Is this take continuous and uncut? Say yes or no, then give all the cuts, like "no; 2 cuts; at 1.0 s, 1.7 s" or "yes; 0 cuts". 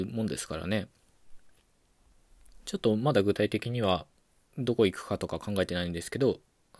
yes; 0 cuts